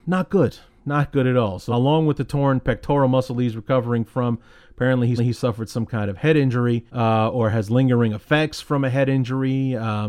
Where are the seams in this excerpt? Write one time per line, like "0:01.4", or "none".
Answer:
0:01.7
0:05.2
0:06.9